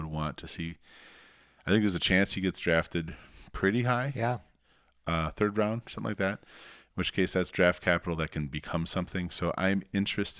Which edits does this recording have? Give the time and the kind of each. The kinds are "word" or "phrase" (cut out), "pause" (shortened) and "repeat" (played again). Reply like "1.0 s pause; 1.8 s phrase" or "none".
none